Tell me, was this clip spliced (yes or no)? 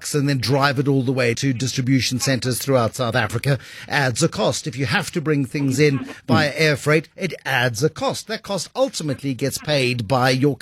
yes